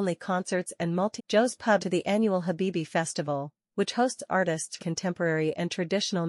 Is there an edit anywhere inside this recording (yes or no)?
yes